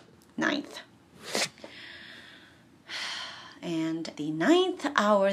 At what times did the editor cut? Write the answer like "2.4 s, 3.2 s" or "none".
4.1 s